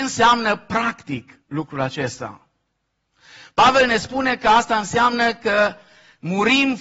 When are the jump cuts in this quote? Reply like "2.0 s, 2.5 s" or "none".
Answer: 1.4 s